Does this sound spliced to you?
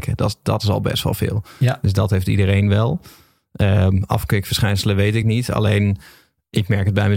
no; 0 cuts

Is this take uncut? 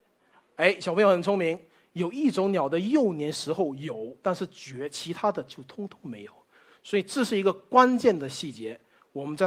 yes; 0 cuts

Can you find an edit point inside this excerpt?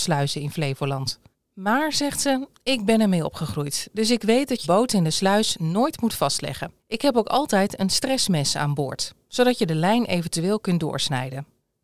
yes; 3 cuts; at 1.3 s, 4.6 s, 6.8 s

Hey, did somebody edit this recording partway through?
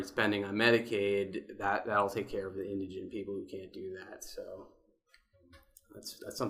no; 0 cuts

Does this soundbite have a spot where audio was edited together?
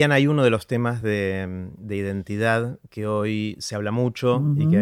no; 0 cuts

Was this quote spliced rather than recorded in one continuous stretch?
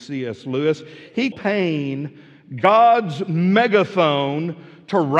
yes; 1 cut; at 1.3 s

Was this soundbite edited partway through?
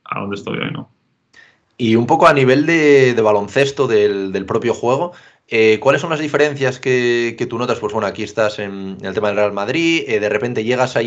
no; 0 cuts

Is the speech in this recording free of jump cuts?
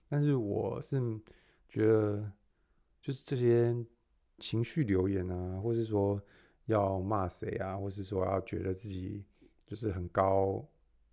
no; 1 cut; at 4.4 s

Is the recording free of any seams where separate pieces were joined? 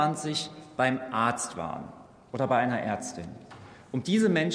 yes; 0 cuts

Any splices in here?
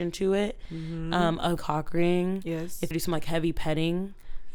yes; 2 cuts; at 1.6 s, 2.9 s

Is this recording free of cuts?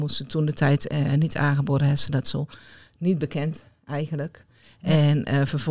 yes; 0 cuts

